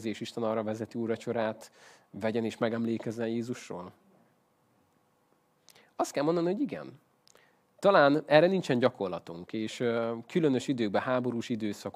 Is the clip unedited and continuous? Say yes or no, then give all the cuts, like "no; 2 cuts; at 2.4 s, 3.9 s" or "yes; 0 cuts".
yes; 0 cuts